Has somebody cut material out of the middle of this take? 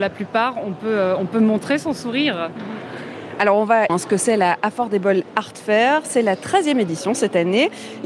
yes; 1 cut; at 3.9 s

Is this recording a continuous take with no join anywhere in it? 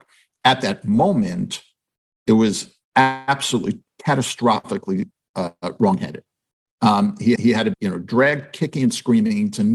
no; 3 cuts; at 2.8 s, 7.4 s, 7.7 s

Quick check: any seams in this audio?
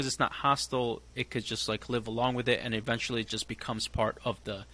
no; 0 cuts

